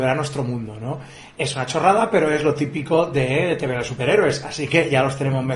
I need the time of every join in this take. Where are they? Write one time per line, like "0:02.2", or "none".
none